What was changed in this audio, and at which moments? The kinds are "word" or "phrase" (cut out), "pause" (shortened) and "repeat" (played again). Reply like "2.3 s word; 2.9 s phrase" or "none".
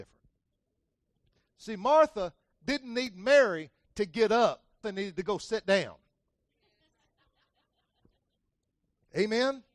4.8 s word